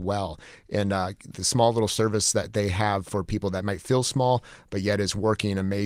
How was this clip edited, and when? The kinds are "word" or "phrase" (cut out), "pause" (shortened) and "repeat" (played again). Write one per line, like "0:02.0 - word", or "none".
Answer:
none